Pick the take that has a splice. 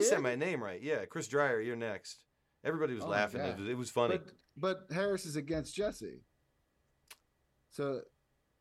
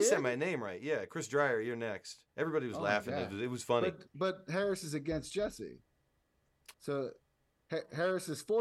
second; 3 cuts; at 2.3 s, 4.1 s, 6.7 s

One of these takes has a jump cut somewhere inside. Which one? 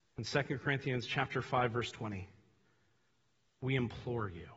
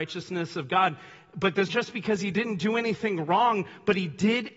second; 1 cut; at 1.7 s

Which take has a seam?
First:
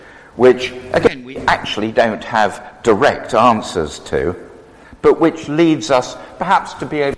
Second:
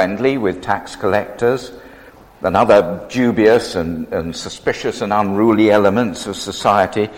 second; 1 cut; at 2.1 s

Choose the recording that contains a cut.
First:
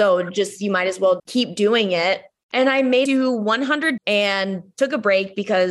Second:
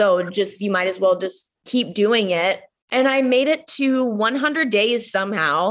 first; 3 cuts; at 1.2 s, 3.1 s, 4.0 s

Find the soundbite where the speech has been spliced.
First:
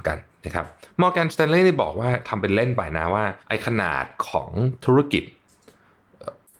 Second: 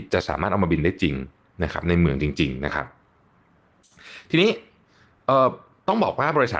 first; 1 cut; at 3.4 s

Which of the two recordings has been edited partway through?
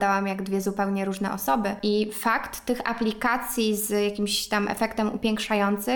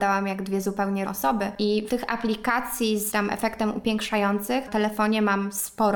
second; 4 cuts; at 1.1 s, 1.9 s, 3.1 s, 4.7 s

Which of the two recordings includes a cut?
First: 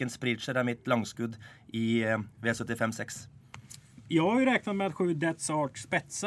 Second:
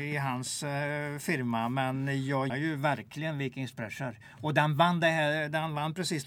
second; 1 cut; at 2.5 s

